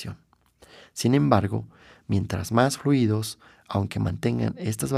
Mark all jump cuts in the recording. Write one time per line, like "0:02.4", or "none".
none